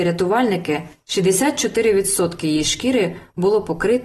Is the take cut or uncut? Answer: uncut